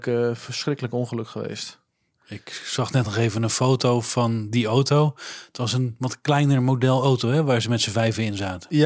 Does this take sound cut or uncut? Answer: uncut